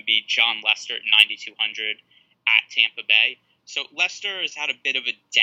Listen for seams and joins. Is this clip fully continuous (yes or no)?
yes